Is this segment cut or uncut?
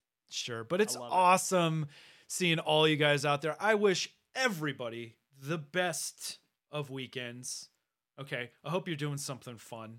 uncut